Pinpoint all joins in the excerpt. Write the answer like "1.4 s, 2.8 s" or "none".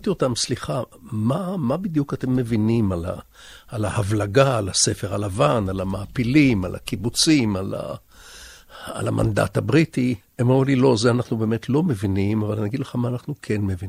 10.2 s